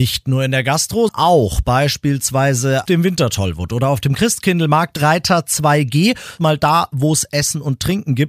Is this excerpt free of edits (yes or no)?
no